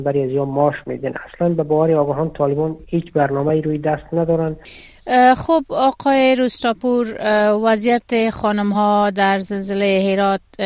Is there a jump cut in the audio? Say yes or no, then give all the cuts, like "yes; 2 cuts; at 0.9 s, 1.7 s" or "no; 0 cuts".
no; 0 cuts